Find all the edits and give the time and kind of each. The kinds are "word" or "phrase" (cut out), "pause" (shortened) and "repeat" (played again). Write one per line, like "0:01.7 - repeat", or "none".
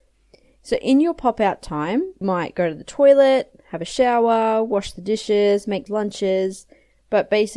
0:02.2 - word
0:05.9 - word